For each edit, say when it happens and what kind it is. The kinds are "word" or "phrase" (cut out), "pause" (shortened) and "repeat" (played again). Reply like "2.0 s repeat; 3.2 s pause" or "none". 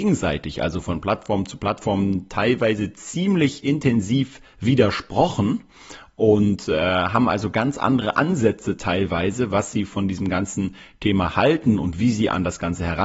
none